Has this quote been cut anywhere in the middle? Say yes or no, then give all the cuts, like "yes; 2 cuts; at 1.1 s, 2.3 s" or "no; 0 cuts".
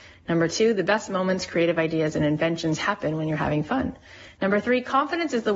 no; 0 cuts